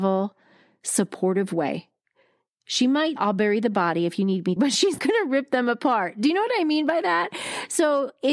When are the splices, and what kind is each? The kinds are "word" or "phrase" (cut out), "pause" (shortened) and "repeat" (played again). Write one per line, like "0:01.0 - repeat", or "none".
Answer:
0:03.2 - word
0:04.6 - word
0:05.0 - word